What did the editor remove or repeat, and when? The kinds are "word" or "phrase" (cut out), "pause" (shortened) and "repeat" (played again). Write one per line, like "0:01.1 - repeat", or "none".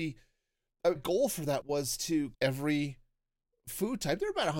0:01.0 - word
0:01.6 - word
0:02.3 - word